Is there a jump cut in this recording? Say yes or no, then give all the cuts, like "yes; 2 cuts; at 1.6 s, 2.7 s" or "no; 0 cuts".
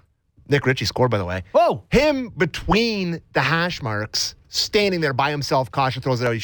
no; 0 cuts